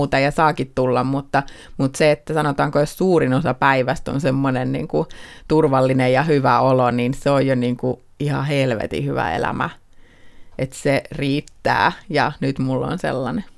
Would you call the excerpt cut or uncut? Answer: uncut